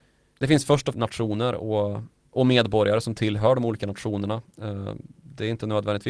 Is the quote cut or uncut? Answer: cut